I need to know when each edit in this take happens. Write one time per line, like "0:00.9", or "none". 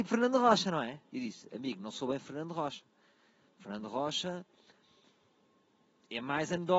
0:01.1

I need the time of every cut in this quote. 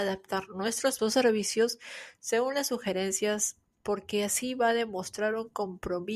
0:01.0

